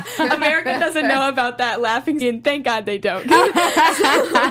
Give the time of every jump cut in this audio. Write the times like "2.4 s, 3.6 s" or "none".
2.2 s